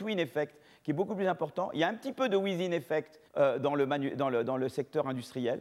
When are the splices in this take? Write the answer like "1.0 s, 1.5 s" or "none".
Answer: 3.3 s